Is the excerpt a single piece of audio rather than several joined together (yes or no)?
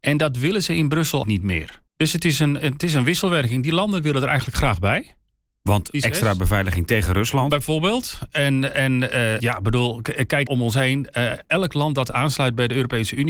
no